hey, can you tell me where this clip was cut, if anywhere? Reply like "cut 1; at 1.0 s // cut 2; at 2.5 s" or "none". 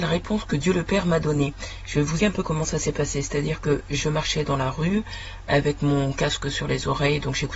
cut 1; at 2.2 s